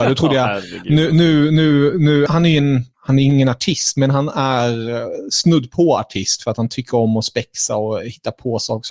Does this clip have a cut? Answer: yes; 2 cuts; at 2.3 s, 2.9 s

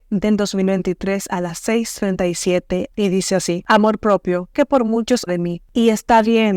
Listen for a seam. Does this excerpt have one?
yes; 3 cuts; at 2.9 s, 4.5 s, 5.3 s

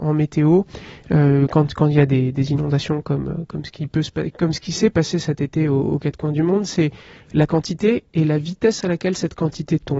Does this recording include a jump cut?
no; 0 cuts

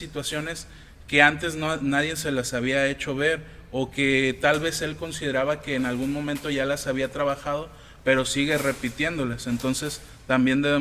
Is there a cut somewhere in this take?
no; 0 cuts

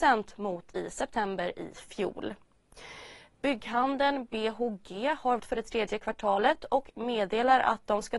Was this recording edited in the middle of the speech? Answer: yes; 1 cut; at 5.4 s

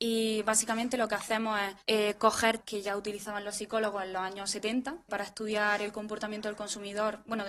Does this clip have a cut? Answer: yes; 3 cuts; at 1.8 s, 2.6 s, 5.1 s

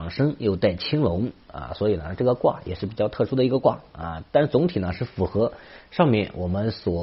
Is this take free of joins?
yes; 0 cuts

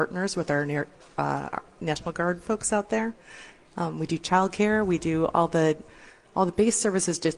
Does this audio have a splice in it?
no; 0 cuts

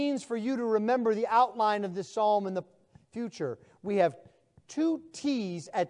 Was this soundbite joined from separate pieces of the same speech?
no; 0 cuts

